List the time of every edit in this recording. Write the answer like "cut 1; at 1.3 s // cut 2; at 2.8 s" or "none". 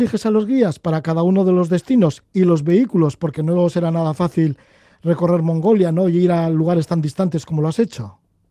none